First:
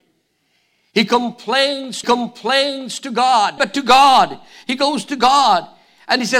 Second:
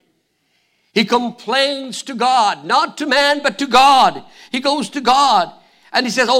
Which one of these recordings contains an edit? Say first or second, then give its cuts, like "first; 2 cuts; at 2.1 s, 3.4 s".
first; 2 cuts; at 2.0 s, 3.6 s